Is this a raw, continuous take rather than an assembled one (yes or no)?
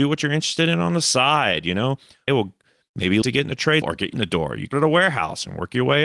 no